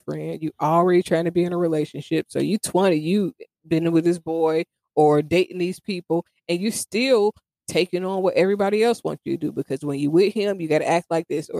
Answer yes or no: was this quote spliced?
no